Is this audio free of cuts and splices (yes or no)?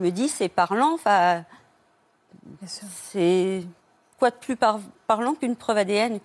yes